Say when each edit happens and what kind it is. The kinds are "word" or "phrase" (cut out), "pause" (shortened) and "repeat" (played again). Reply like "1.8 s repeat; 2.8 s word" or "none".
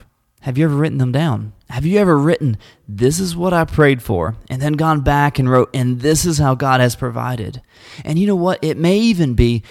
none